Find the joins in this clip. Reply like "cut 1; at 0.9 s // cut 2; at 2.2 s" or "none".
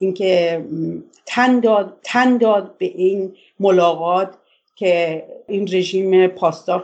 cut 1; at 2.0 s